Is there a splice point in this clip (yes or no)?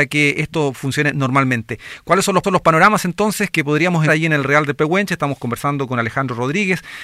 yes